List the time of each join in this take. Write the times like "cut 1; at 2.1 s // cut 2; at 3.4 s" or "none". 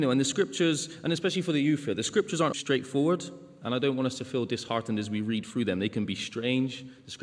cut 1; at 2.5 s